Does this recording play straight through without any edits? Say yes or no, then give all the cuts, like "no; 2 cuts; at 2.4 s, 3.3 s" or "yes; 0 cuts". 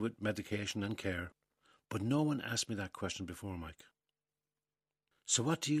yes; 0 cuts